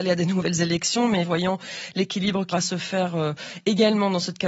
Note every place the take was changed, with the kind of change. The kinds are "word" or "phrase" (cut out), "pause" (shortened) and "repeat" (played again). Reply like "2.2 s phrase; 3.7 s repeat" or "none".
1.2 s word; 2.5 s word